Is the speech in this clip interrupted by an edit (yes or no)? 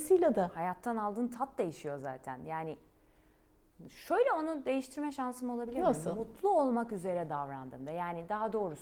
no